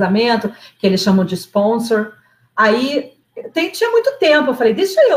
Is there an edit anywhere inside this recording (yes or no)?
no